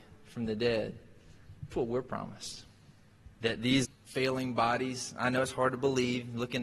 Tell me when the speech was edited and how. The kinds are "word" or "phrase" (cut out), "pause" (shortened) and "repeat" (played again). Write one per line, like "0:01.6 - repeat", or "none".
0:01.7 - word
0:03.3 - pause
0:03.8 - phrase